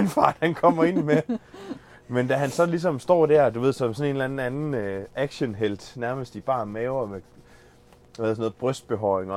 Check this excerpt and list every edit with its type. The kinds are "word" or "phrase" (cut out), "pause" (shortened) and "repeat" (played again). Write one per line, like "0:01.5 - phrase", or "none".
none